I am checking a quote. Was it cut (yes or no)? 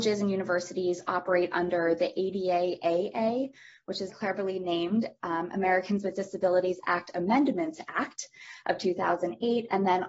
yes